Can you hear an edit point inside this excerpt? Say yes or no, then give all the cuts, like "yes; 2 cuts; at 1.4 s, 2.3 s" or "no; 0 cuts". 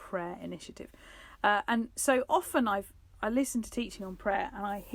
no; 0 cuts